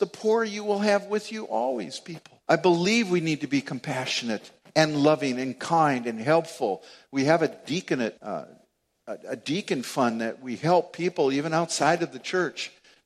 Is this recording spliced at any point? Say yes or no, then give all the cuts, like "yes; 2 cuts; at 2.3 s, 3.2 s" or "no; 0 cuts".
yes; 3 cuts; at 2.4 s, 4.6 s, 8.2 s